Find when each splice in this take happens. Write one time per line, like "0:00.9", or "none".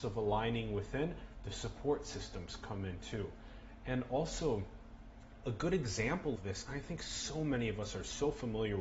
0:06.4